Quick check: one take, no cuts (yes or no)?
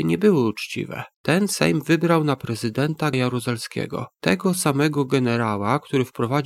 no